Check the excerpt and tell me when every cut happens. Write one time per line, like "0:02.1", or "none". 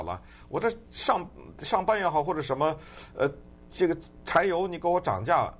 none

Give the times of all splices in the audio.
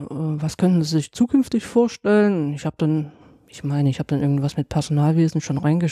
none

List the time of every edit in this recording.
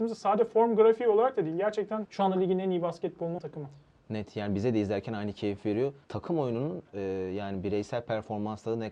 0:02.0
0:03.4
0:06.0
0:06.9

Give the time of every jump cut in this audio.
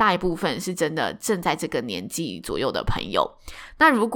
none

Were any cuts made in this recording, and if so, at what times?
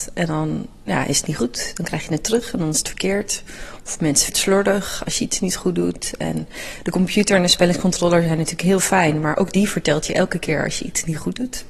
0:04.3

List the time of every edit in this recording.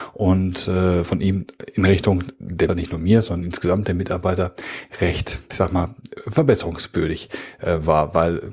0:02.7
0:05.5

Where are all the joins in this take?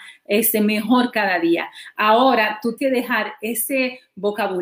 0:02.8

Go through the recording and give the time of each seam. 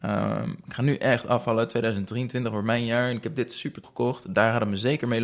0:03.8

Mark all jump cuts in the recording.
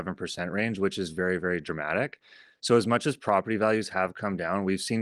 none

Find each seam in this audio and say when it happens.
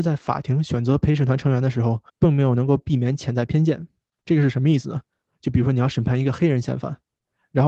0:02.1
0:04.1

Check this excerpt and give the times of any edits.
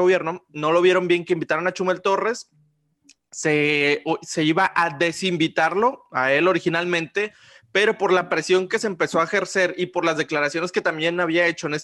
none

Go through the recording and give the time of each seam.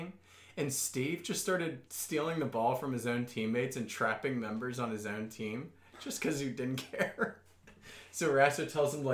0:01.9

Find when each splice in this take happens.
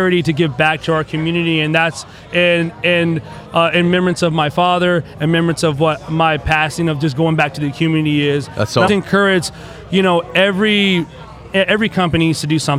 0:08.9

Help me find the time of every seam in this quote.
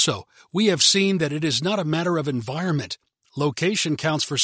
none

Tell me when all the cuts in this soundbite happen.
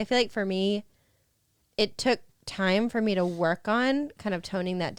none

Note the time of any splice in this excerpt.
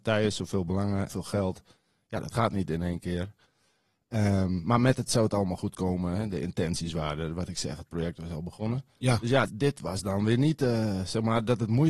0:01.1
0:05.1
0:09.5

